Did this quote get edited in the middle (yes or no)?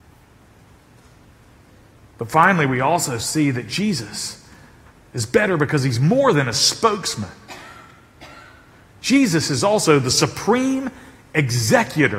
no